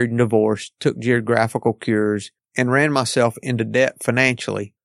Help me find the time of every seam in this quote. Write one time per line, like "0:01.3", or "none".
0:02.4